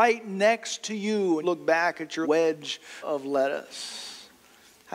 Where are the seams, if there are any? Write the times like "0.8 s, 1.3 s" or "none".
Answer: 1.4 s, 2.2 s, 3.0 s